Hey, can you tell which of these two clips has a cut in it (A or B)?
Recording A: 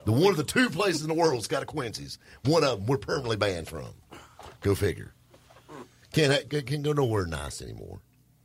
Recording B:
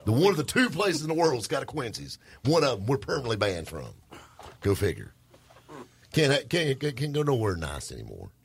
A